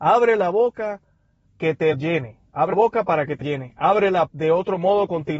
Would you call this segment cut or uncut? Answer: cut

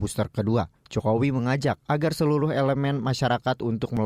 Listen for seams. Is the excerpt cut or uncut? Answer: uncut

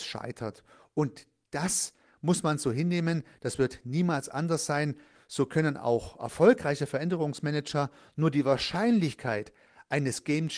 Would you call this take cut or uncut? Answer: uncut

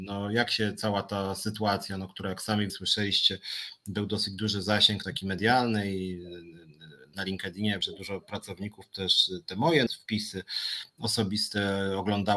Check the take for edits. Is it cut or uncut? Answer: cut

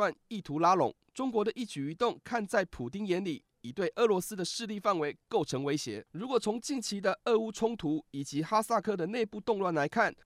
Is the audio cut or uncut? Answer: uncut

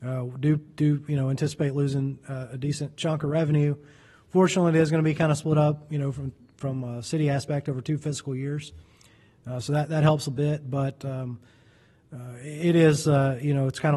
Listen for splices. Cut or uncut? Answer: uncut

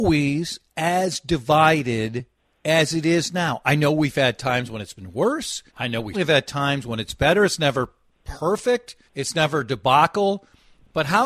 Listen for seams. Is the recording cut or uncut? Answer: cut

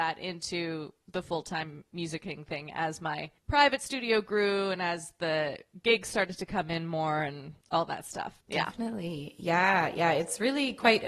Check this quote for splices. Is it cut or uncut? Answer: cut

